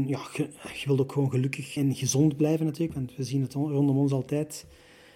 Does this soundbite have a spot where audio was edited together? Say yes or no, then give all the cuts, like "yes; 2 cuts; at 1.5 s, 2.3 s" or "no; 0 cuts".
yes; 1 cut; at 1.8 s